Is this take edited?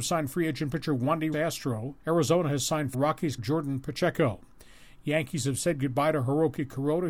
yes; 4 cuts; at 1.3 s, 2.0 s, 2.9 s, 3.4 s

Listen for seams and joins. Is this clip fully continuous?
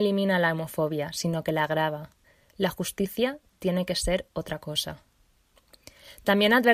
yes; 0 cuts

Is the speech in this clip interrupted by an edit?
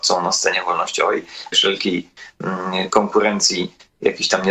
yes; 1 cut; at 1.5 s

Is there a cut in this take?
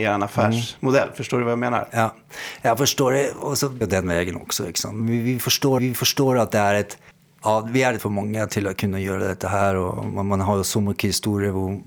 yes; 4 cuts; at 3.8 s, 5.8 s, 7.1 s, 8.0 s

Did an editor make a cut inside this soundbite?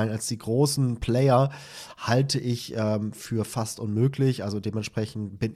no; 0 cuts

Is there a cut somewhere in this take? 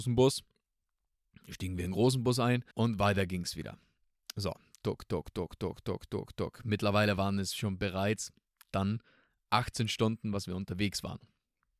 yes; 1 cut; at 2.7 s

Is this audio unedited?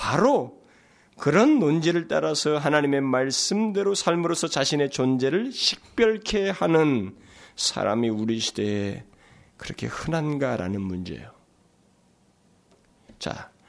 yes; 0 cuts

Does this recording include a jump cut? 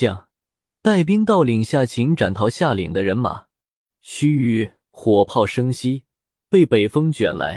no; 0 cuts

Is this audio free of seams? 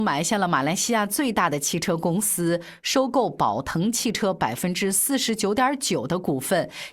yes; 0 cuts

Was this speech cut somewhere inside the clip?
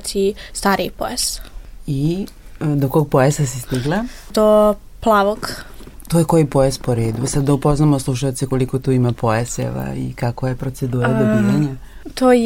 no; 0 cuts

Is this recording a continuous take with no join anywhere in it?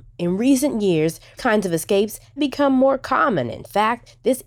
no; 2 cuts; at 1.4 s, 2.4 s

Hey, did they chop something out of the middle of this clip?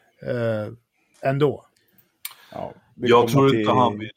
no; 0 cuts

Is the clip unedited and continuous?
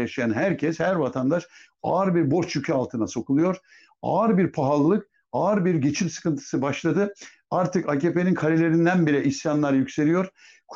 yes; 0 cuts

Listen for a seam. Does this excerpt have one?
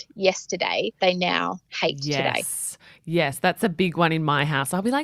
yes; 1 cut; at 1.0 s

